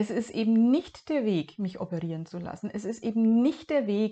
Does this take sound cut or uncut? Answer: uncut